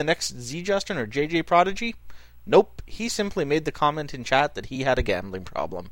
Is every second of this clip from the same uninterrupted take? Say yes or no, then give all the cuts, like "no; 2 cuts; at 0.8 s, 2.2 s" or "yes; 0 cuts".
yes; 0 cuts